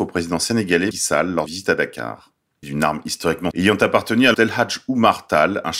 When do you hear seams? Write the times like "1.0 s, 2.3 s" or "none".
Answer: 0.9 s, 1.5 s, 2.6 s, 3.5 s, 4.3 s